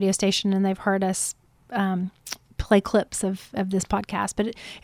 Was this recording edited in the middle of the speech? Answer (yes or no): no